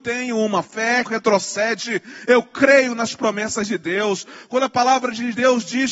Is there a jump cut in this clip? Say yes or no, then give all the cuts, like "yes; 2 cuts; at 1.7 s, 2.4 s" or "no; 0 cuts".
yes; 1 cut; at 1.1 s